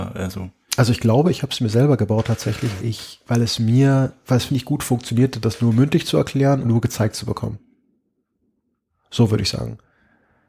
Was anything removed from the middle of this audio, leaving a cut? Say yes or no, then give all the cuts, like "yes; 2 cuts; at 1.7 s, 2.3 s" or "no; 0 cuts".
yes; 3 cuts; at 2.8 s, 4.5 s, 6.6 s